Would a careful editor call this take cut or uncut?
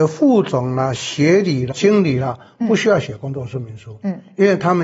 cut